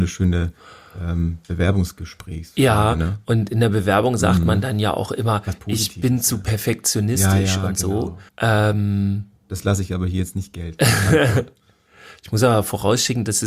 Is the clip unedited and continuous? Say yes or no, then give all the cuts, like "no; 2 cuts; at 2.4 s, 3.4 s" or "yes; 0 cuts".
no; 1 cut; at 8.3 s